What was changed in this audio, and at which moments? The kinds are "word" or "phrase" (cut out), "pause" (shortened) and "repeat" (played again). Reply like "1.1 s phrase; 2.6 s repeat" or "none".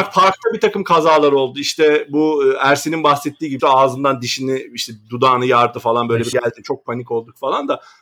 3.6 s phrase; 6.3 s word

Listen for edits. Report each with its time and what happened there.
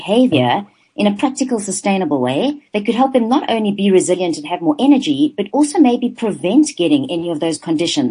2.7 s pause

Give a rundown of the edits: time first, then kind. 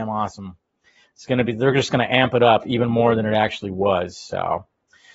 none

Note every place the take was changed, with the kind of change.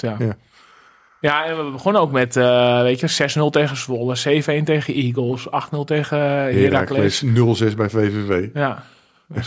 none

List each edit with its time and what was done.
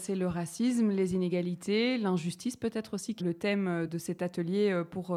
3.2 s word; 3.9 s word

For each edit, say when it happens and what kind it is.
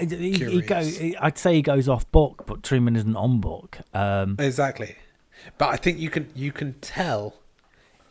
none

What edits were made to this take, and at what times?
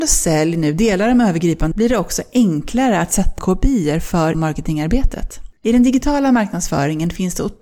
1.7 s word; 3.4 s word; 4.3 s word; 5.6 s pause

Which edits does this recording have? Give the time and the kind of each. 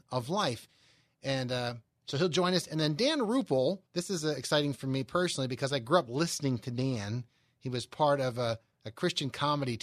3.9 s pause

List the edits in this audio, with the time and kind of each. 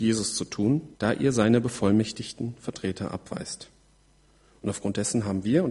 0.9 s pause

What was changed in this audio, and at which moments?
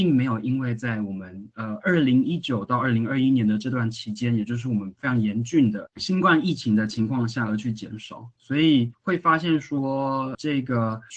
8.4 s pause; 8.9 s pause

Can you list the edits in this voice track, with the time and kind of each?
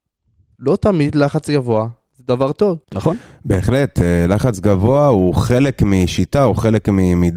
2.8 s pause

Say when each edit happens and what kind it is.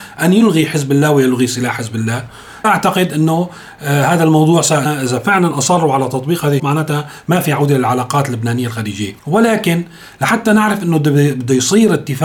2.6 s phrase; 4.9 s phrase; 6.6 s word; 9.2 s pause

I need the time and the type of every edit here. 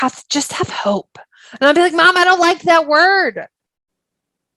none

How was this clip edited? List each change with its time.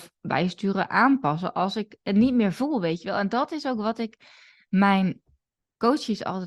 none

